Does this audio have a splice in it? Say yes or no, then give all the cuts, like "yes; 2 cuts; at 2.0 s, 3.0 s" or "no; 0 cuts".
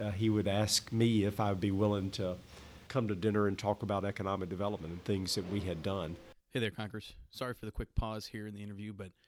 yes; 2 cuts; at 2.9 s, 6.4 s